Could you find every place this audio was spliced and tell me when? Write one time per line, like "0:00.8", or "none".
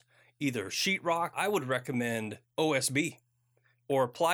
0:01.3
0:02.4